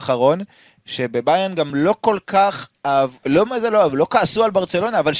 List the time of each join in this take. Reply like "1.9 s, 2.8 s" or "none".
none